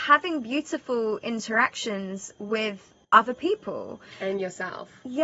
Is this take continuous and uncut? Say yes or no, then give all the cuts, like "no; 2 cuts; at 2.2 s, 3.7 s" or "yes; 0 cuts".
no; 1 cut; at 3.0 s